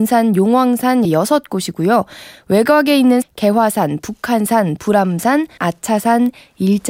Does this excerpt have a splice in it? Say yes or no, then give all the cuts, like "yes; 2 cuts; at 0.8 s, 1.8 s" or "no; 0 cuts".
yes; 4 cuts; at 1.0 s, 3.2 s, 4.8 s, 5.6 s